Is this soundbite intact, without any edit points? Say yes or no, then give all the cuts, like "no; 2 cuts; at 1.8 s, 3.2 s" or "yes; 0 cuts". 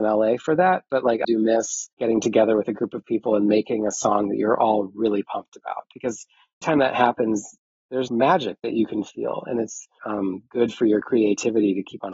no; 5 cuts; at 1.2 s, 1.9 s, 6.6 s, 8.1 s, 10.0 s